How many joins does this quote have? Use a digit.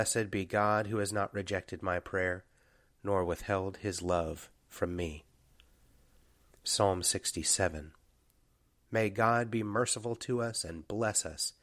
0